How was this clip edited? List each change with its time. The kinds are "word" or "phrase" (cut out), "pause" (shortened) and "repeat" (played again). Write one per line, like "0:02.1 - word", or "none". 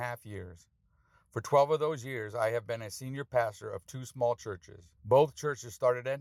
0:05.0 - pause